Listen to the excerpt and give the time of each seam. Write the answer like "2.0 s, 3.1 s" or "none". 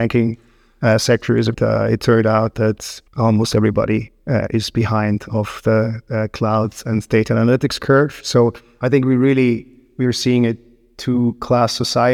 1.5 s, 3.1 s